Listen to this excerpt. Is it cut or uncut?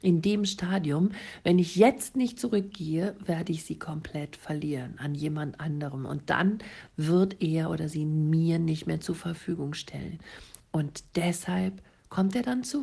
uncut